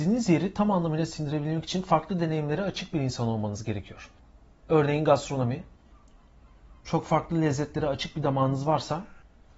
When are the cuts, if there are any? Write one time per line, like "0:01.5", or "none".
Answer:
none